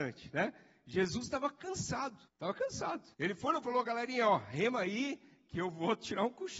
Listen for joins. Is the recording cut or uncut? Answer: cut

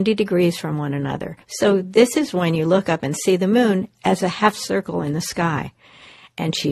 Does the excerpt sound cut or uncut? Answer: cut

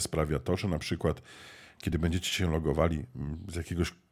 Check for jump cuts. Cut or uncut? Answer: uncut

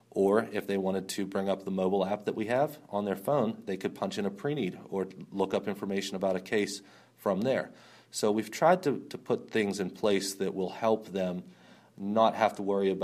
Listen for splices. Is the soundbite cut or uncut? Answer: uncut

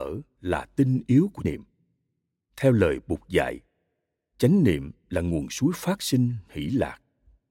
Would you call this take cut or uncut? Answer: cut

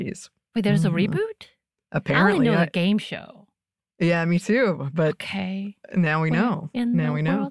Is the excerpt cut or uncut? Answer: uncut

